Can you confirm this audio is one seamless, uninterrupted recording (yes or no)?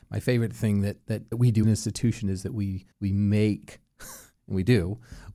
no